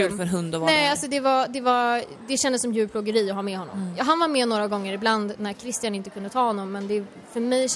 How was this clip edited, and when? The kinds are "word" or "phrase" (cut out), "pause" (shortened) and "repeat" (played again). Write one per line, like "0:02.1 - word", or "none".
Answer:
none